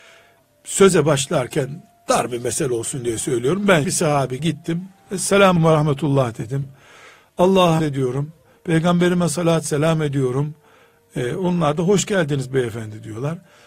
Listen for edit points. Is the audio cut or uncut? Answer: cut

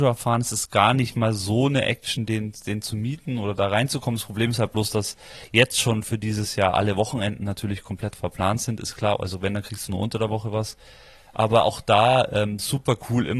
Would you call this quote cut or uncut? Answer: uncut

